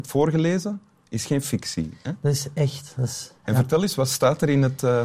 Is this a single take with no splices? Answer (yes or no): yes